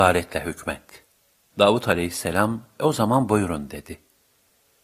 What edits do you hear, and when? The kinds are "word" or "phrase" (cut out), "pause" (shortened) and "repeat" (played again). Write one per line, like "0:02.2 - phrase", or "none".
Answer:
0:01.3 - pause